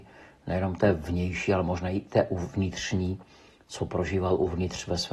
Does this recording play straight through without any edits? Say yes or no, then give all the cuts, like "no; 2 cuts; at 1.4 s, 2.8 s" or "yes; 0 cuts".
yes; 0 cuts